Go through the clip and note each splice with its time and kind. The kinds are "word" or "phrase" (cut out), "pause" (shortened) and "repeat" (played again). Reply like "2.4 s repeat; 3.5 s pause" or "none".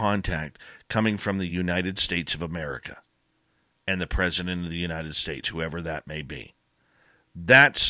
none